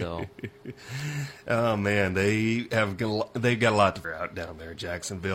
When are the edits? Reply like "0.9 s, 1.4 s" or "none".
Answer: 4.0 s